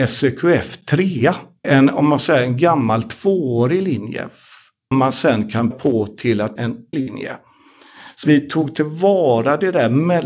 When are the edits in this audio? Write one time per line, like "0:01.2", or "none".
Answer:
0:01.6
0:04.9
0:05.7
0:06.6
0:06.9
0:08.2